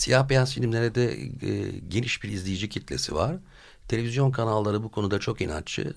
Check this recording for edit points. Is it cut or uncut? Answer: uncut